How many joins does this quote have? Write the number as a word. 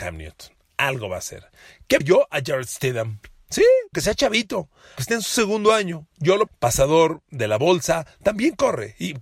four